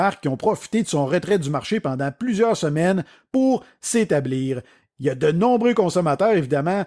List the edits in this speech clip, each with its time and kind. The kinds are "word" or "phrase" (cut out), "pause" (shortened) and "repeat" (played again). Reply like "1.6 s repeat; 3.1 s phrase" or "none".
none